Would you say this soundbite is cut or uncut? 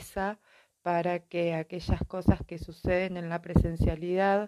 uncut